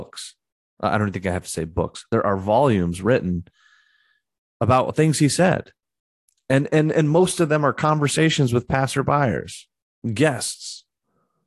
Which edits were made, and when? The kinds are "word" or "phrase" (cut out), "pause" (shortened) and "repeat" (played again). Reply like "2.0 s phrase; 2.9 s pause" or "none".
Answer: none